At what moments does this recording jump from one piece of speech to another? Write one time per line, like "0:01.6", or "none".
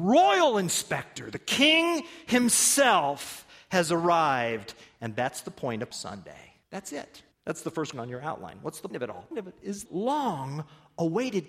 0:05.9
0:06.6
0:07.3
0:07.9
0:08.9
0:09.3
0:09.9